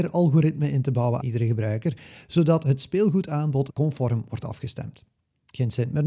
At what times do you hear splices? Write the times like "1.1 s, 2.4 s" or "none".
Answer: 1.2 s, 3.7 s